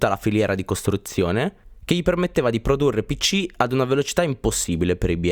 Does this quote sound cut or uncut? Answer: uncut